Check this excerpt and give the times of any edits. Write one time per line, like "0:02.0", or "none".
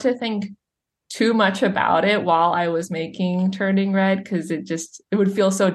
none